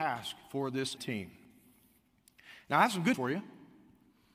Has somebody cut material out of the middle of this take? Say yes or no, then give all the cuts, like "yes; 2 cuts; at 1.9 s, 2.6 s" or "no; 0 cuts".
yes; 2 cuts; at 1.0 s, 3.1 s